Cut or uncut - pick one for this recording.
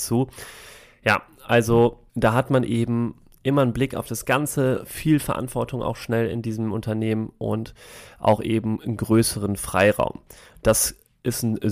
cut